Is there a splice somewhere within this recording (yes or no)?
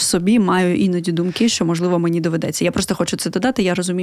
no